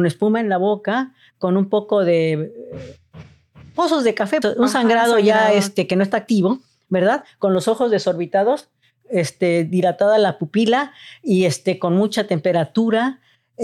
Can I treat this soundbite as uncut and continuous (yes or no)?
no